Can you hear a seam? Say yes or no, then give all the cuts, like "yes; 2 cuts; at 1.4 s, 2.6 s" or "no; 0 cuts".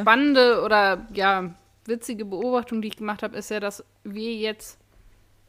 no; 0 cuts